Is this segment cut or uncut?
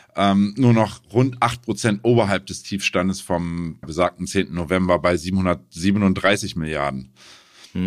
cut